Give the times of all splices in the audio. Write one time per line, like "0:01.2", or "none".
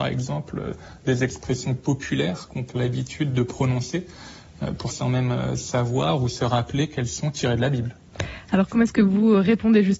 0:02.7
0:04.9